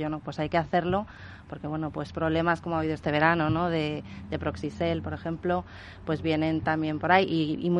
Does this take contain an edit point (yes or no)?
no